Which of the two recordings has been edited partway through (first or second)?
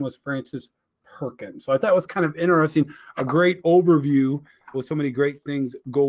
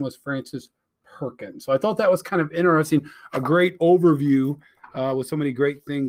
first